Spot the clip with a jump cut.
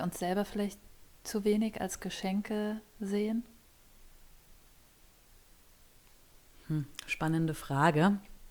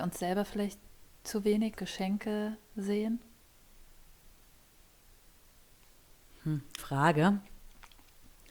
second; 2 cuts; at 1.7 s, 6.8 s

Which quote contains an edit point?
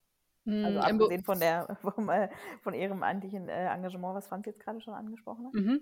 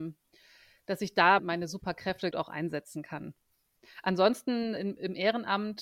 second; 3 cuts; at 1.4 s, 2.3 s, 4.8 s

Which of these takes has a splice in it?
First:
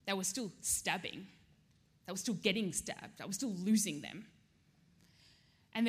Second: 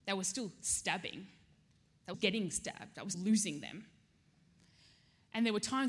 second; 2 cuts; at 2.1 s, 3.1 s

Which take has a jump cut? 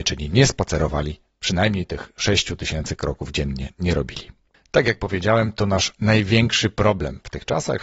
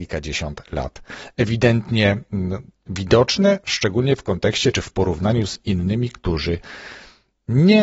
first; 1 cut; at 4.5 s

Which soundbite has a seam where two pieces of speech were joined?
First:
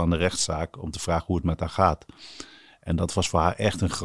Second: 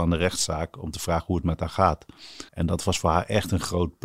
second; 1 cut; at 2.5 s

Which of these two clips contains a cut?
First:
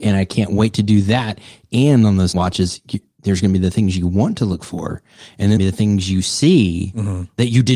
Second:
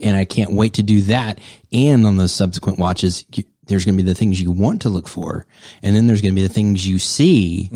first; 2 cuts; at 2.3 s, 5.6 s

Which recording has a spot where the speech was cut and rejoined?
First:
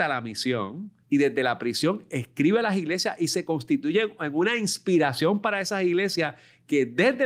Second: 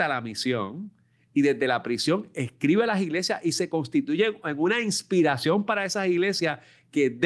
first; 1 cut; at 1.0 s

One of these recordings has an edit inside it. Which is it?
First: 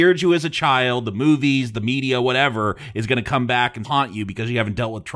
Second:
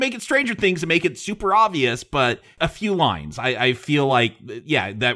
first; 1 cut; at 3.8 s

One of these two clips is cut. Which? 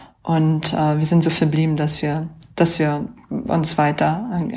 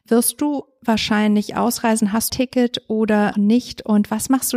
second; 2 cuts; at 2.3 s, 3.3 s

